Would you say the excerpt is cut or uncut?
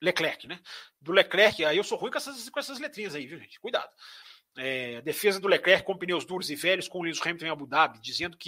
uncut